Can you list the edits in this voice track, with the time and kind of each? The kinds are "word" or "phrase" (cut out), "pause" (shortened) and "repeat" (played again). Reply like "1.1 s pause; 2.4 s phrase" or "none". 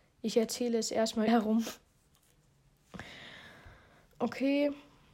1.3 s word